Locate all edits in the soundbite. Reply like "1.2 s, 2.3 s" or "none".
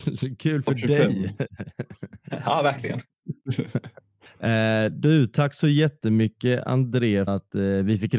4.3 s, 7.3 s